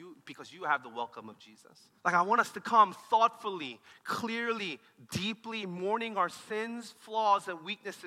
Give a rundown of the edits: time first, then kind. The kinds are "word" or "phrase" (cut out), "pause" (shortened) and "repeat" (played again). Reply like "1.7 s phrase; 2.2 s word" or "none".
2.0 s pause